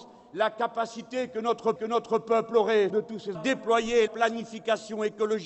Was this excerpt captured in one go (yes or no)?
no